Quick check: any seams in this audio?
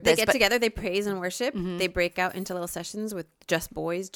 no; 0 cuts

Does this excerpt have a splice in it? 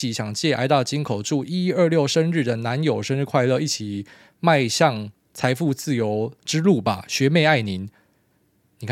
no; 0 cuts

